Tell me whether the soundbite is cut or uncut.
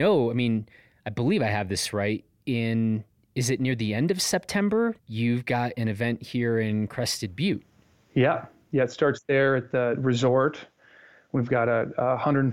cut